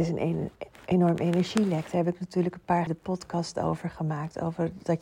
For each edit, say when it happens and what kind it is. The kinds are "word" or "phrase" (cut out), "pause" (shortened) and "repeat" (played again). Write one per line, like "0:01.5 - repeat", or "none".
0:02.9 - word